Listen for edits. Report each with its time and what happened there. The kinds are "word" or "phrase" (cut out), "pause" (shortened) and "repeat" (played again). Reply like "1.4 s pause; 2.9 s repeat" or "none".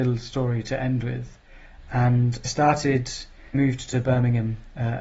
2.4 s word; 3.5 s phrase